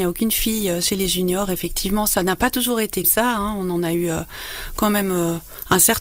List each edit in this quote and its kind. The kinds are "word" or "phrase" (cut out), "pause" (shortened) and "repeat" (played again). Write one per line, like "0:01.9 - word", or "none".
0:03.0 - word